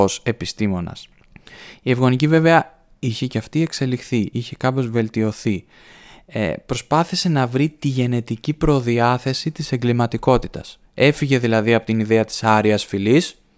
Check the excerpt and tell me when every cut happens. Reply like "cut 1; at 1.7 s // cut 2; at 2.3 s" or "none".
none